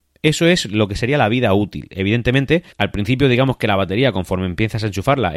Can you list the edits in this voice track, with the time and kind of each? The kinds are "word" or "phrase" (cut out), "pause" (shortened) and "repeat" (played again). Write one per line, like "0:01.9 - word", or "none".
0:02.7 - pause